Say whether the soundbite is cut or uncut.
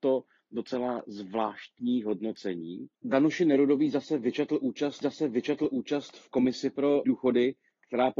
cut